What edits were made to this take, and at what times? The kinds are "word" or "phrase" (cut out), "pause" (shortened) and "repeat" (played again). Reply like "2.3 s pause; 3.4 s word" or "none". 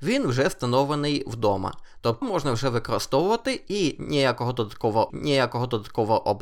2.2 s word; 5.1 s repeat